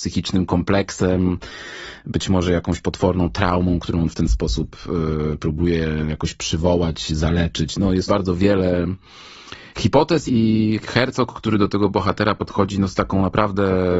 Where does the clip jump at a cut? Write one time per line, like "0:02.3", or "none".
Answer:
0:08.1
0:10.3